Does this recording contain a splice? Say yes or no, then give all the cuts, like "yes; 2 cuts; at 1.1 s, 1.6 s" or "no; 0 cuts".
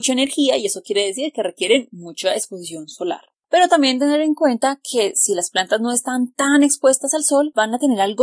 no; 0 cuts